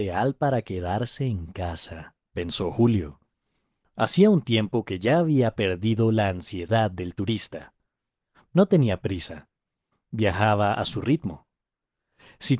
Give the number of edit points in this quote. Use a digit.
1